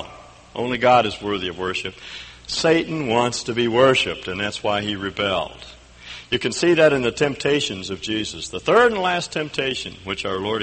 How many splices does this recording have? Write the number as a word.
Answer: zero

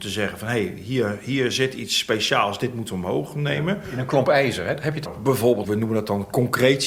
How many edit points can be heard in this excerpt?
two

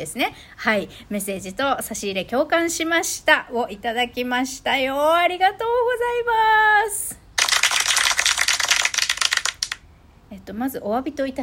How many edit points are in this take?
zero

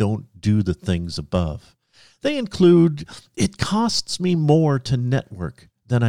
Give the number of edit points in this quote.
zero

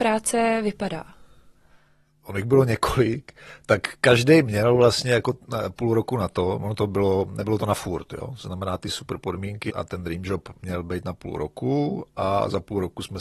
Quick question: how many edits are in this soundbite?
one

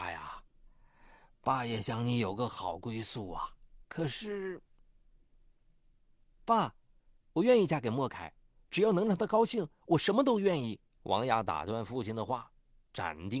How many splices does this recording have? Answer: one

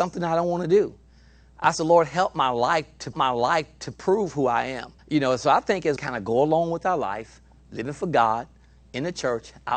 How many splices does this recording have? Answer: three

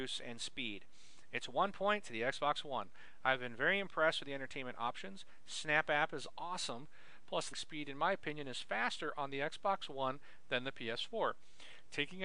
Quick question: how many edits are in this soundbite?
one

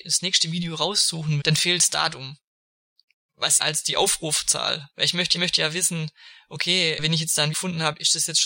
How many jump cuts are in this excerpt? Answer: six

